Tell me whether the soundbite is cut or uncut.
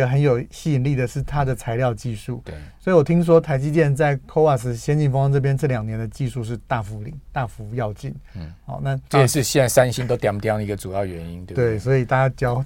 cut